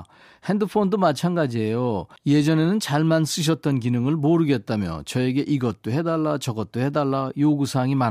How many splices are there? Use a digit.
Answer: 0